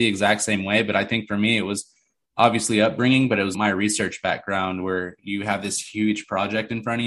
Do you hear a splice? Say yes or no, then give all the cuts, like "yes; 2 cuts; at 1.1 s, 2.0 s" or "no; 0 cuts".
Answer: yes; 1 cut; at 3.5 s